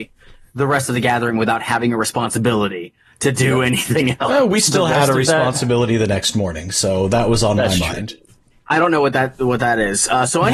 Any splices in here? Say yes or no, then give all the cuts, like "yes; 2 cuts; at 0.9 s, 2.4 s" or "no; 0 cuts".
no; 0 cuts